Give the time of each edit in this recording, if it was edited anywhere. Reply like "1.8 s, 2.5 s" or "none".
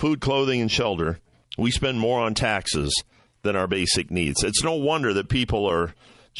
none